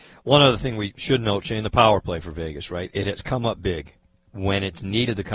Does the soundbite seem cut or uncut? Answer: uncut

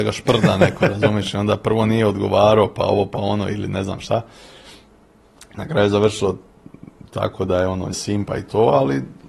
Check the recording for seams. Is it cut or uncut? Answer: cut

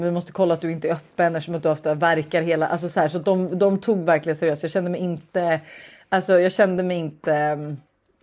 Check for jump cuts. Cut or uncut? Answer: uncut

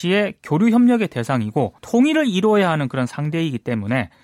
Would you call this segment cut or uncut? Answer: cut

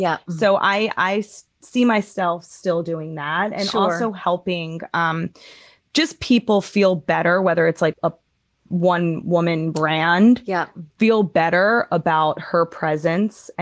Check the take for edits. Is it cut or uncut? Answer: cut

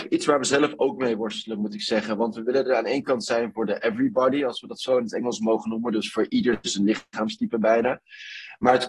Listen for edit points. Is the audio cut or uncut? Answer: uncut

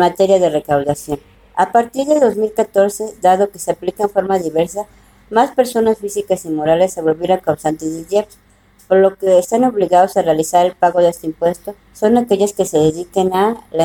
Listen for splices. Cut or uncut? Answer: uncut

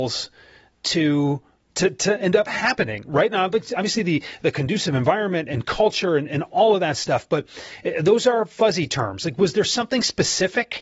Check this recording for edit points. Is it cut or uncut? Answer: uncut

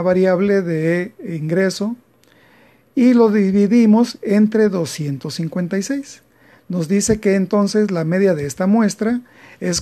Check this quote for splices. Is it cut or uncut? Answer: uncut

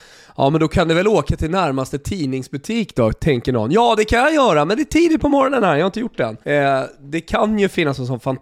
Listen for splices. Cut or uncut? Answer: cut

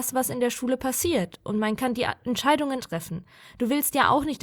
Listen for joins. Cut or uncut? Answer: cut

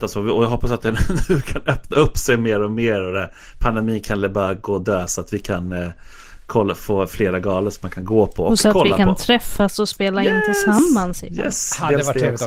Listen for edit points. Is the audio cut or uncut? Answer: uncut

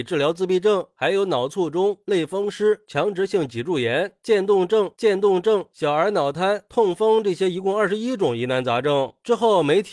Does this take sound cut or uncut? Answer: cut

